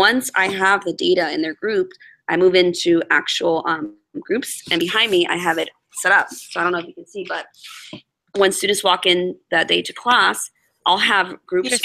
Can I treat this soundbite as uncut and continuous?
yes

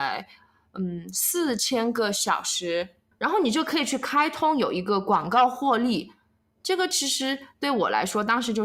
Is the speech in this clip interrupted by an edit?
no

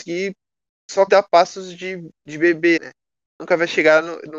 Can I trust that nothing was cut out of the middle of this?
no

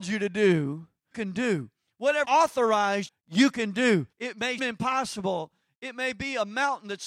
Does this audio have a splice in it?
yes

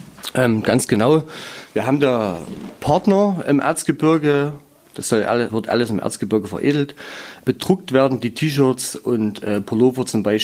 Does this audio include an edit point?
yes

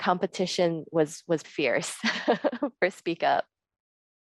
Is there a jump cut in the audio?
yes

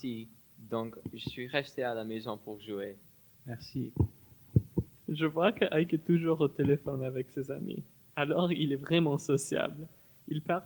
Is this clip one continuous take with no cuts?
yes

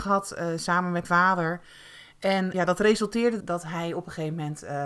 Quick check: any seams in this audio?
yes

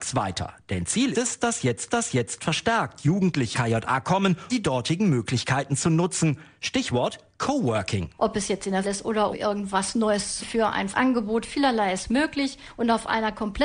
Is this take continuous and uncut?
no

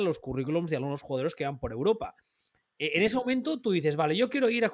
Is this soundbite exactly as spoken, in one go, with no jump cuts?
yes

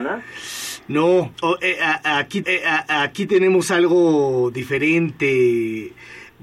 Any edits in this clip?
yes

